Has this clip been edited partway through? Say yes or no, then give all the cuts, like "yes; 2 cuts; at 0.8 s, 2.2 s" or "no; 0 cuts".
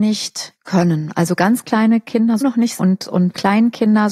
yes; 2 cuts; at 2.4 s, 2.8 s